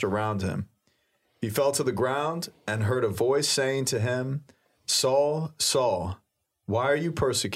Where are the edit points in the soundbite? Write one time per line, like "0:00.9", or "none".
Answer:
none